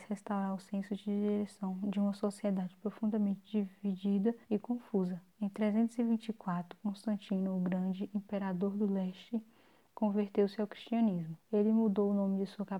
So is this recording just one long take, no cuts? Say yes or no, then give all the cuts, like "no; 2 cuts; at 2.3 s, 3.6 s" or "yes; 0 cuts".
no; 3 cuts; at 4.4 s, 5.3 s, 11.4 s